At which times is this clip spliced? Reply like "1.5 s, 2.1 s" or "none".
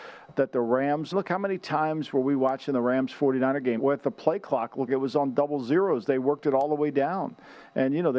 1.1 s, 3.8 s, 4.9 s

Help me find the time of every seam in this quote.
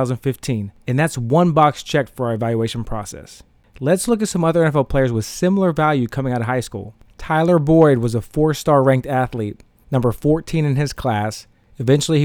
none

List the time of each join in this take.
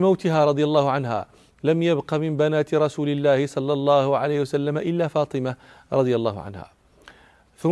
none

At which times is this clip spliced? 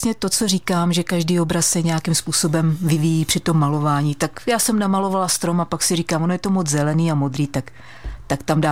none

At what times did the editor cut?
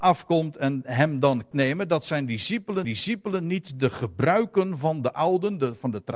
1.5 s, 2.8 s

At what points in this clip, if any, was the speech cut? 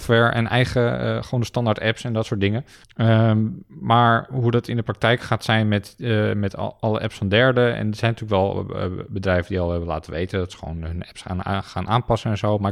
2.8 s

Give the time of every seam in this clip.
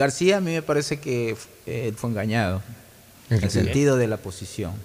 2.0 s, 3.4 s

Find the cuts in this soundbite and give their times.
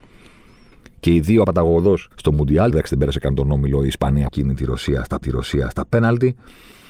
1.4 s, 2.1 s, 2.7 s, 4.3 s, 5.2 s

